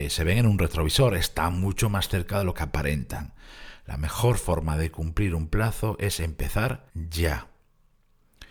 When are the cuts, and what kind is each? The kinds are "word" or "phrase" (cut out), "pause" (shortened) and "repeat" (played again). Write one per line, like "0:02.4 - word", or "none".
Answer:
0:06.9 - pause